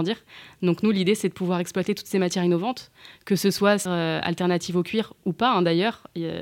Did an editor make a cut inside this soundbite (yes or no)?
yes